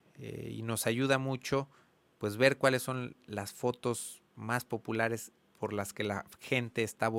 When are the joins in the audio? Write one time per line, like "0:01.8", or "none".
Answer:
none